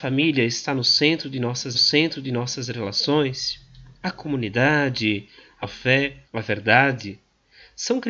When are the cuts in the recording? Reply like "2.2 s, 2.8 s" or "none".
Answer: 1.7 s, 5.6 s, 6.2 s